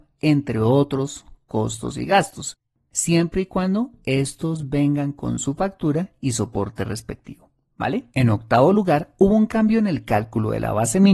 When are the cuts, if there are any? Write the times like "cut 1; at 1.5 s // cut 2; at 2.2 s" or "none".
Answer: cut 1; at 8.1 s